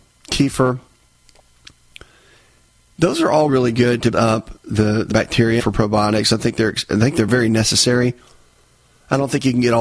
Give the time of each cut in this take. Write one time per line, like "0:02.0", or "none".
0:03.5
0:04.1
0:05.1
0:05.6